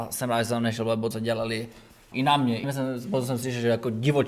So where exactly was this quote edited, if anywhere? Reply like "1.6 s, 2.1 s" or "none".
1.1 s, 2.1 s, 2.6 s